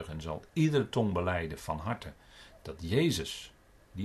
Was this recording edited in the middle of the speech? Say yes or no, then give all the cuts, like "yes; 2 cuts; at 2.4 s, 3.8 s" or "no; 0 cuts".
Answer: no; 0 cuts